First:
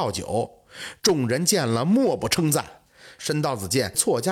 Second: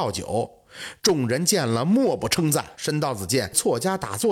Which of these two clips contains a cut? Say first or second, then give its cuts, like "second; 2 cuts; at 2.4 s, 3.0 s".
second; 1 cut; at 2.7 s